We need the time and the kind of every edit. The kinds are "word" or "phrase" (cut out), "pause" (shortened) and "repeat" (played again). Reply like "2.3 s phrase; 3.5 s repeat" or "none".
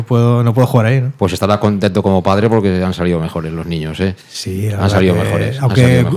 4.2 s pause